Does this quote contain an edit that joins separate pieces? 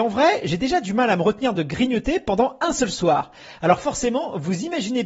no; 0 cuts

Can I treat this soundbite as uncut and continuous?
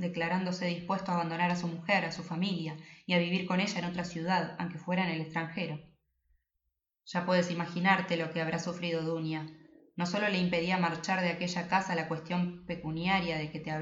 yes; 0 cuts

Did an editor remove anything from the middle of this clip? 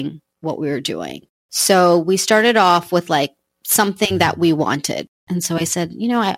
no; 0 cuts

